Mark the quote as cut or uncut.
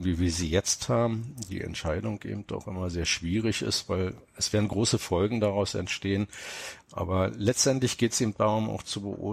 uncut